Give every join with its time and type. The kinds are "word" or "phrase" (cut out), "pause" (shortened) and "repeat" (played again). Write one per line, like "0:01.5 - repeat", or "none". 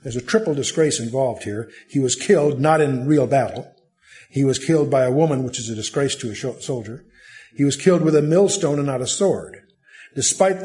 none